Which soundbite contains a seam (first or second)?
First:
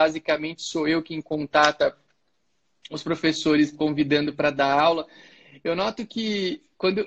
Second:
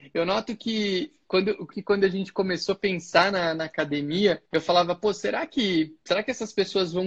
second